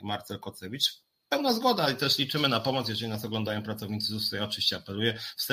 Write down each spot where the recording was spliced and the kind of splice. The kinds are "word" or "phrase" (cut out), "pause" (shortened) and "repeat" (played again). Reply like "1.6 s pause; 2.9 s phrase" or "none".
none